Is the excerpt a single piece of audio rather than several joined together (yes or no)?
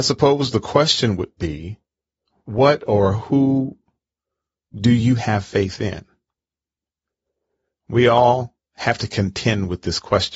yes